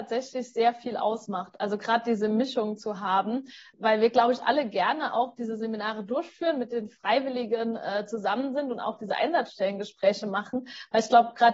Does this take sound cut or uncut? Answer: uncut